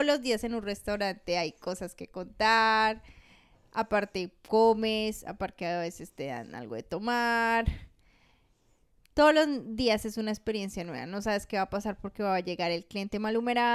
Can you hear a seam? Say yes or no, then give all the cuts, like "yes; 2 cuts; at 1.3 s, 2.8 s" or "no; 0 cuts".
no; 0 cuts